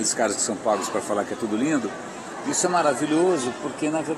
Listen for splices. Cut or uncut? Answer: uncut